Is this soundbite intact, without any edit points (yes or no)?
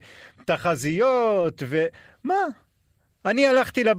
yes